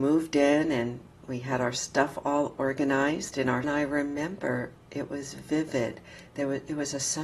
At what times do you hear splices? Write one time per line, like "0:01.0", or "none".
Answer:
0:03.6